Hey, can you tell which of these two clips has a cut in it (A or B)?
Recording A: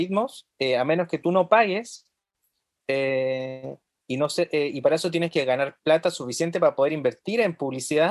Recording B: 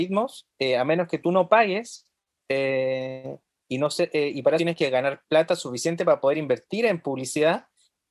B